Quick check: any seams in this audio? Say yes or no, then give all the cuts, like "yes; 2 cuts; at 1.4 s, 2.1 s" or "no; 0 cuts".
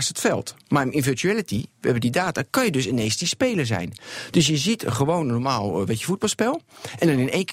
no; 0 cuts